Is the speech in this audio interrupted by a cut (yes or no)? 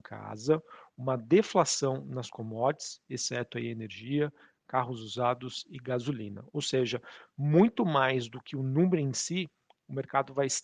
no